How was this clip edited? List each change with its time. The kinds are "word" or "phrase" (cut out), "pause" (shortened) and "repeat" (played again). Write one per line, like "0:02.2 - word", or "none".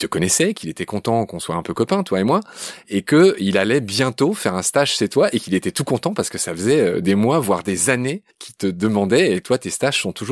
0:08.3 - pause